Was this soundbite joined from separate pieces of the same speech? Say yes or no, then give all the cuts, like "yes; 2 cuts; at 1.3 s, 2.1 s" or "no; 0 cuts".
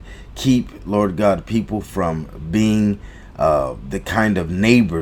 no; 0 cuts